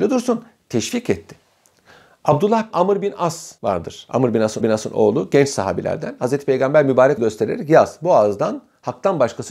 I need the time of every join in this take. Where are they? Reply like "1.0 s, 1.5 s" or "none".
2.7 s, 3.6 s, 4.6 s, 7.2 s